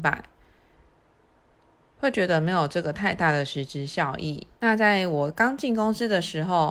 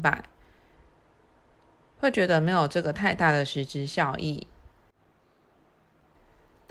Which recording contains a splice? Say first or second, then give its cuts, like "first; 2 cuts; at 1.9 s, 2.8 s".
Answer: first; 1 cut; at 4.6 s